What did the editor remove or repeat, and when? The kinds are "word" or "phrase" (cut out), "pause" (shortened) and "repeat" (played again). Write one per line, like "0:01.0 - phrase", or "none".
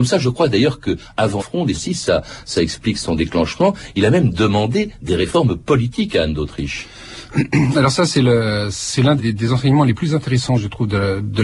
0:01.4 - word
0:01.7 - word
0:09.2 - word